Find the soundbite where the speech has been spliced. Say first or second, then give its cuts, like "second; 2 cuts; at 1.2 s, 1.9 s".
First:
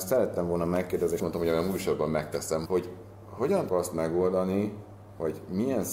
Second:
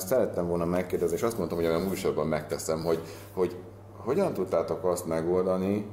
first; 3 cuts; at 1.2 s, 2.7 s, 3.7 s